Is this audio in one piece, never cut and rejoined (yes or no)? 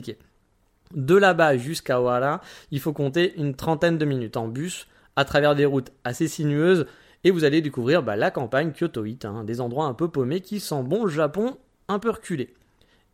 yes